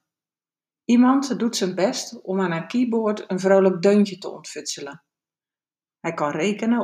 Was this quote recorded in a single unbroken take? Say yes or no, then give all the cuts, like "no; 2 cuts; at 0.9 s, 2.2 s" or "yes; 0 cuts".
yes; 0 cuts